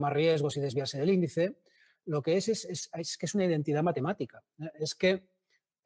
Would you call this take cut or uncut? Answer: uncut